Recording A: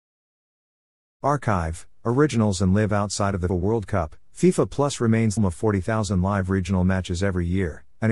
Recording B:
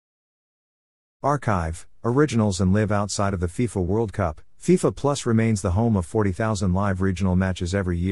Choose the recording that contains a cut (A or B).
A